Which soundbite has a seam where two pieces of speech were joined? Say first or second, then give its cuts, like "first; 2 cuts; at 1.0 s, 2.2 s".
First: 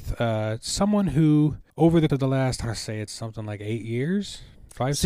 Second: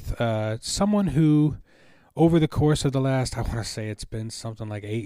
first; 4 cuts; at 1.7 s, 2.1 s, 2.6 s, 3.1 s